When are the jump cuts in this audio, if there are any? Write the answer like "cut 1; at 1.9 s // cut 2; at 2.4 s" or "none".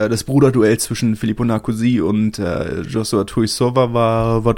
none